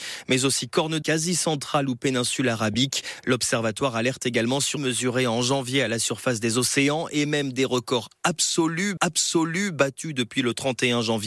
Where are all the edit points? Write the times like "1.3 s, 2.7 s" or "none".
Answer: 1.0 s, 4.8 s, 9.0 s